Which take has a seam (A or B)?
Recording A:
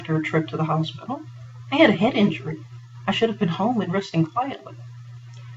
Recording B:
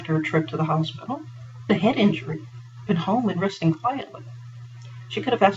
B